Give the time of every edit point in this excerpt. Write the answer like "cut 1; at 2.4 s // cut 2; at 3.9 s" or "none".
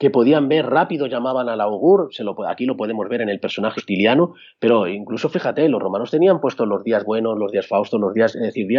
cut 1; at 3.8 s